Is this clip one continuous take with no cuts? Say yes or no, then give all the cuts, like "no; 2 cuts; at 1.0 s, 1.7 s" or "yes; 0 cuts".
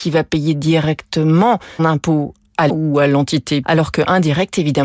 no; 3 cuts; at 1.8 s, 2.7 s, 3.6 s